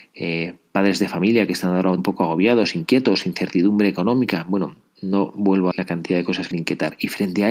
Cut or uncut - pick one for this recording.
cut